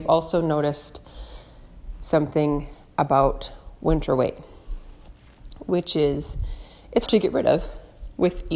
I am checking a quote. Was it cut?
yes; 1 cut; at 7.1 s

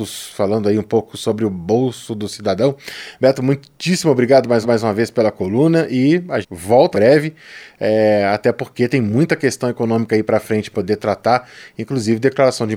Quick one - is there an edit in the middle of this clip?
yes; 4 cuts; at 4.6 s, 6.4 s, 6.9 s, 10.7 s

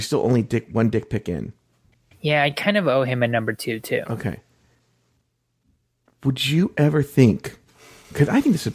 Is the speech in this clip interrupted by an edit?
no; 0 cuts

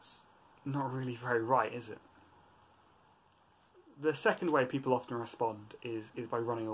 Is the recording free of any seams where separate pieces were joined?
yes; 0 cuts

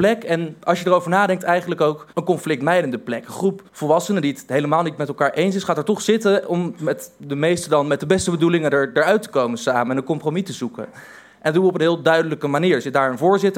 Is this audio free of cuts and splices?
no; 2 cuts; at 2.1 s, 3.7 s

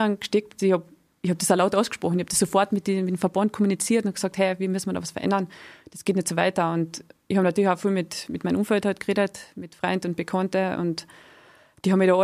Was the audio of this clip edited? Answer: no; 0 cuts

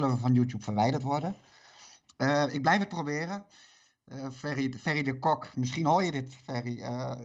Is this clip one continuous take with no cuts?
yes; 0 cuts

